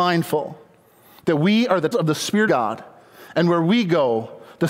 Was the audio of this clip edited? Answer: yes; 2 cuts; at 1.9 s, 2.5 s

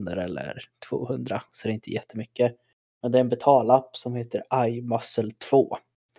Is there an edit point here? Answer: no; 0 cuts

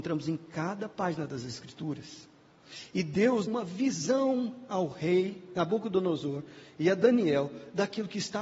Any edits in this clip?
yes; 1 cut; at 3.5 s

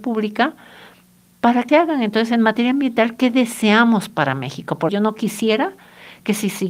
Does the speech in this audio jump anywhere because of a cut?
yes; 2 cuts; at 1.7 s, 4.9 s

